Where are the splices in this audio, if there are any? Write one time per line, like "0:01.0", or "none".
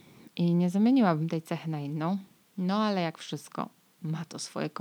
none